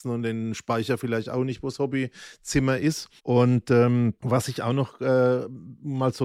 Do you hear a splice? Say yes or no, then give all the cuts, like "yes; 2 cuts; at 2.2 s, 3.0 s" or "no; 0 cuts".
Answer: yes; 2 cuts; at 3.2 s, 4.2 s